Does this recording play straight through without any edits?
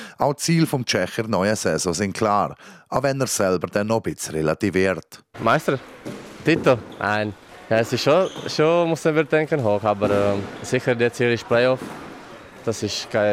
yes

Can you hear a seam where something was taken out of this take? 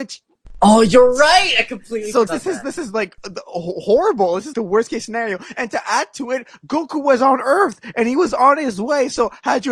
yes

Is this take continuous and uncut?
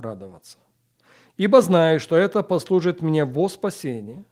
yes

